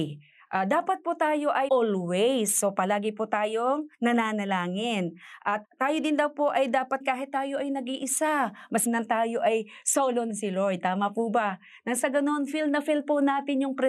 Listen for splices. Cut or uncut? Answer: cut